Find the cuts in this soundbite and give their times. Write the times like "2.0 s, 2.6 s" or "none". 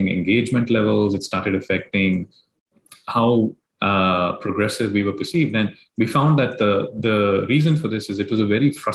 none